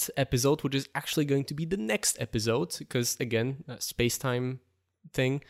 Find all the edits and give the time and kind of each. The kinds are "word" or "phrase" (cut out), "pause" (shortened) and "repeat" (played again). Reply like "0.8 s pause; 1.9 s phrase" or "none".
none

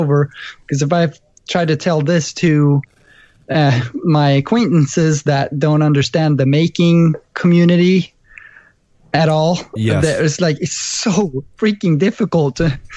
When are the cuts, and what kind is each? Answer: none

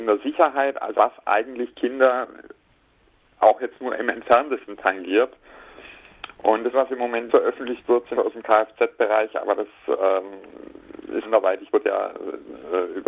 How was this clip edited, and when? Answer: 0.9 s word; 6.7 s word; 7.3 s word; 8.2 s word; 11.2 s word; 11.7 s word

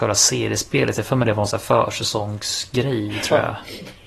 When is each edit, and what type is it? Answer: none

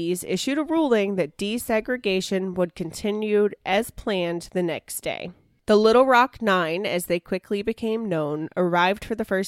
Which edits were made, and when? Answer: none

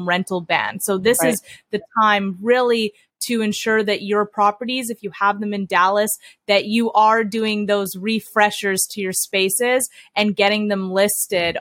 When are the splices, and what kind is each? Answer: none

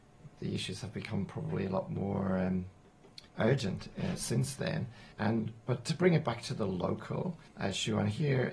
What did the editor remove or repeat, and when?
3.3 s pause; 5.1 s pause; 7.5 s pause

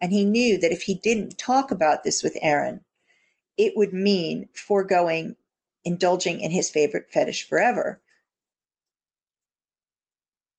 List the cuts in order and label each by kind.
none

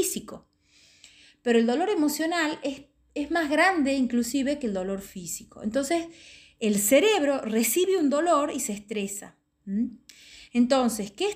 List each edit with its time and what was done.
none

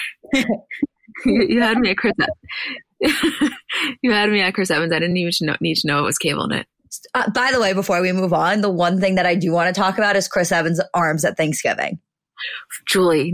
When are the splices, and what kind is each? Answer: none

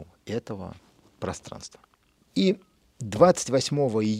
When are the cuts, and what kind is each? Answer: none

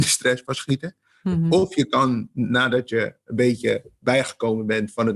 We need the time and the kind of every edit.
none

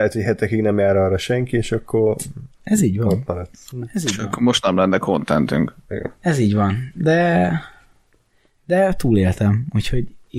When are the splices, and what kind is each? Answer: none

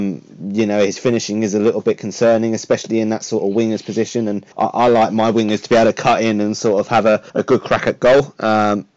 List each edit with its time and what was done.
4.5 s pause; 7.3 s pause

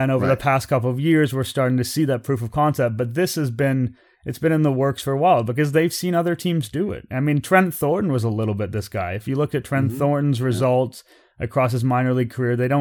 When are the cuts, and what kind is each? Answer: none

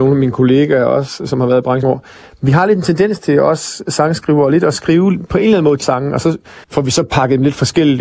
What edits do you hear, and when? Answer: 1.8 s word; 5.8 s word; 6.6 s pause

